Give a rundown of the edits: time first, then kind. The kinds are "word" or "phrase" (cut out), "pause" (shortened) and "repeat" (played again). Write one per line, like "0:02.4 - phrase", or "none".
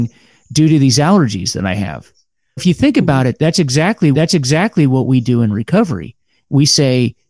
0:02.6 - word
0:04.1 - repeat

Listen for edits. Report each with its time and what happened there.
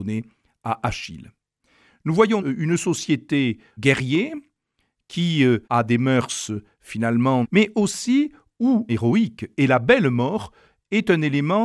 0:02.4 - word
0:03.8 - word
0:05.6 - pause
0:07.4 - phrase
0:08.9 - phrase

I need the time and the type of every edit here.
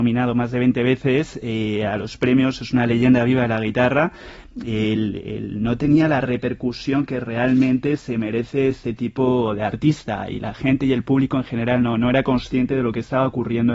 none

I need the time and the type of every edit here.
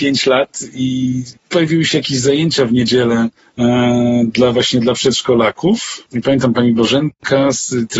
0:01.4 - pause
0:06.1 - pause

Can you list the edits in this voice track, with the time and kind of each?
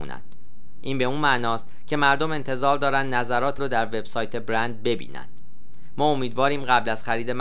0:03.6 - word

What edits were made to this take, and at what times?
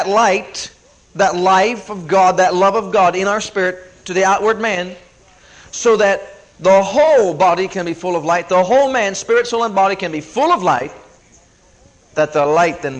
none

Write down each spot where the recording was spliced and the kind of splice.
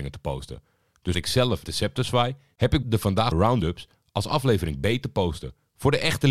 0:01.1 - word
0:01.7 - word
0:02.8 - word
0:03.3 - word

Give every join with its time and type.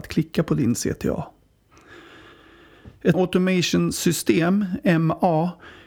0:03.1 - word

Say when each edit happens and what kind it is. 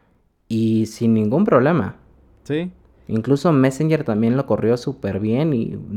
none

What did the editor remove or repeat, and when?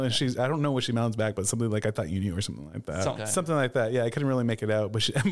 0:03.2 - word

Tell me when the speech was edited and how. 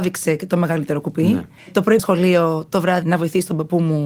0:01.6 - pause
0:02.0 - word
0:03.0 - word

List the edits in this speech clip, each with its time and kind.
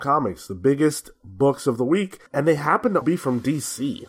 0:02.3 - pause
0:03.0 - word

